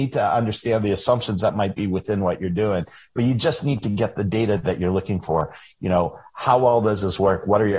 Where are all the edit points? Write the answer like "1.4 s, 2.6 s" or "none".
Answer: none